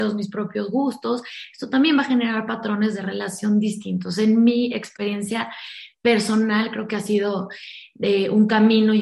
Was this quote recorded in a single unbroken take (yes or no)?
yes